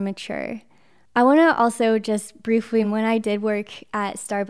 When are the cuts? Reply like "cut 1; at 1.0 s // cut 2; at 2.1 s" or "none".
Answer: cut 1; at 2.8 s